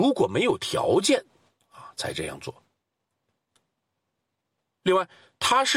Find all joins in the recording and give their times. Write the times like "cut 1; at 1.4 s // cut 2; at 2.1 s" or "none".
none

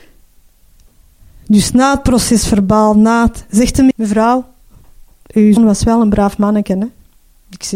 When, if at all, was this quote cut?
cut 1; at 3.9 s // cut 2; at 5.6 s

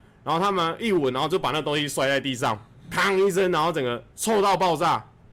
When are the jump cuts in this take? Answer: none

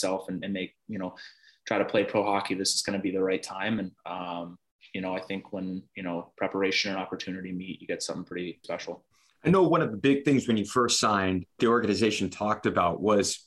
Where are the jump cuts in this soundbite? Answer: cut 1; at 8.6 s // cut 2; at 11.6 s

